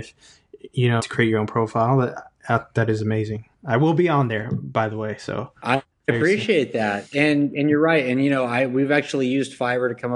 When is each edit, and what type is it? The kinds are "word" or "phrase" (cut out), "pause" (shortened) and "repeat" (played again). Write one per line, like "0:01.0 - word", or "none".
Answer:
0:01.0 - phrase
0:03.5 - pause